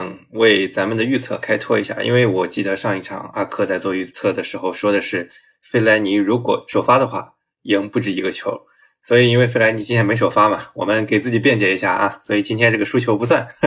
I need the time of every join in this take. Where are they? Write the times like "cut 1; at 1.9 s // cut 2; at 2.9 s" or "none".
none

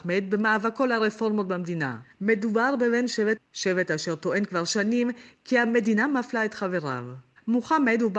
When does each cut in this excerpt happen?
cut 1; at 2.1 s // cut 2; at 3.4 s

